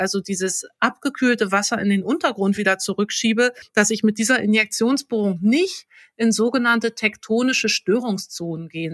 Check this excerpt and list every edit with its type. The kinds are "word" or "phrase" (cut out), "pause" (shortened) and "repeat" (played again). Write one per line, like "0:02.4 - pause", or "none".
none